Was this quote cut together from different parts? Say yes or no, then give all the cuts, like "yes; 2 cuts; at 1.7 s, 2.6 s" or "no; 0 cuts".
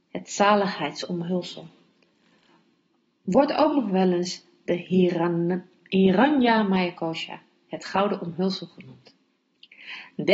no; 0 cuts